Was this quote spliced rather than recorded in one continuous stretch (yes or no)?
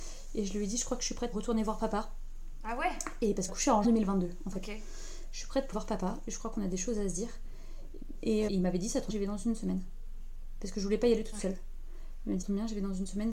yes